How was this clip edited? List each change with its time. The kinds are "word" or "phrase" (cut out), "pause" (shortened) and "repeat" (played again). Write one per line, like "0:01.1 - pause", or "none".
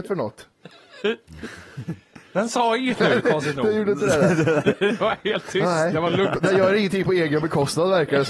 none